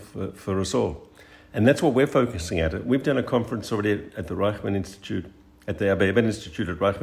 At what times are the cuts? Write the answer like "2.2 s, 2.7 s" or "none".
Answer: none